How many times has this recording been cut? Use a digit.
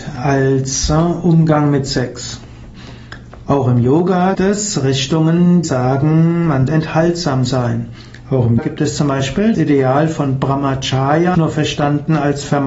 6